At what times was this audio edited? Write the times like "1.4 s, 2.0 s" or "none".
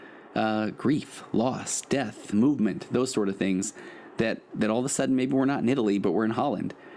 2.3 s